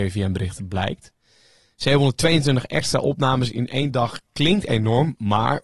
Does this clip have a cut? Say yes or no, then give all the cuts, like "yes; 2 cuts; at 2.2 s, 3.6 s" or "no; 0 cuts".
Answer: no; 0 cuts